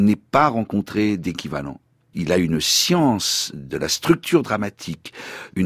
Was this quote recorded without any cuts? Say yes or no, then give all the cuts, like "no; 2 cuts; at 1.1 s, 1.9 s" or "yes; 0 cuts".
yes; 0 cuts